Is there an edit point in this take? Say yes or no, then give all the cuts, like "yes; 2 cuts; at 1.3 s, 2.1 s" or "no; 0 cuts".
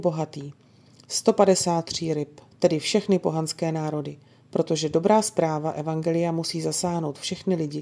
yes; 1 cut; at 2.5 s